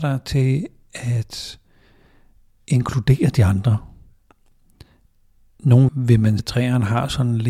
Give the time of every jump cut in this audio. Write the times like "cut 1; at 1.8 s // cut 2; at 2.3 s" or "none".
cut 1; at 2.6 s // cut 2; at 5.9 s // cut 3; at 6.4 s